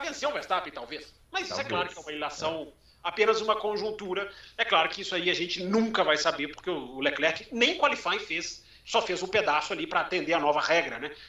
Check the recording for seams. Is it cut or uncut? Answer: uncut